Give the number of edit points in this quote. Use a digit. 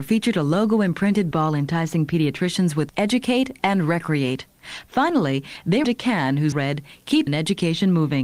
5